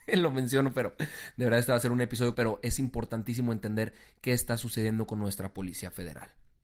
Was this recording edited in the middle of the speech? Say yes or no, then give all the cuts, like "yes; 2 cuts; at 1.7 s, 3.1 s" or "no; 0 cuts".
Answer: yes; 1 cut; at 2.3 s